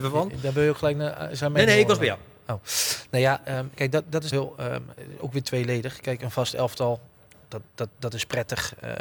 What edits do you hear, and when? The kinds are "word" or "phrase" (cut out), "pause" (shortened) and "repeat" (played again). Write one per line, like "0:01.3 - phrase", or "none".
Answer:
0:04.3 - word